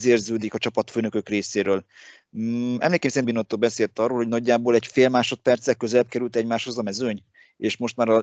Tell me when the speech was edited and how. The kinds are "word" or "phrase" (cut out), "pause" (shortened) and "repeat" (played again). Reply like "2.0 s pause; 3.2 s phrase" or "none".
3.2 s word